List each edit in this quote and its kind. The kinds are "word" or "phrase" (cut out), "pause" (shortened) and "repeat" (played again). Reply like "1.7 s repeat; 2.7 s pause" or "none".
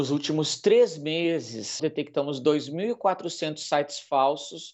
1.8 s word